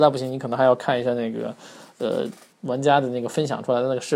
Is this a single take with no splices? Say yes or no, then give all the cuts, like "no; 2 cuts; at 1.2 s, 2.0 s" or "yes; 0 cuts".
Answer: no; 1 cut; at 2.5 s